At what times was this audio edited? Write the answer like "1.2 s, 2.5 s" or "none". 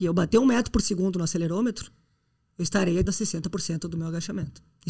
3.1 s